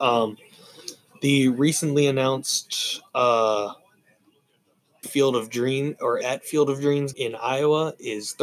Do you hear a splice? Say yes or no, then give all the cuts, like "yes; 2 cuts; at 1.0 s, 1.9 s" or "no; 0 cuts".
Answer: yes; 3 cuts; at 5.0 s, 6.2 s, 7.1 s